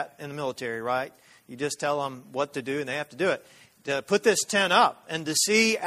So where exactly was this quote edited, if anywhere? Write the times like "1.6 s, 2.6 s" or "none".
none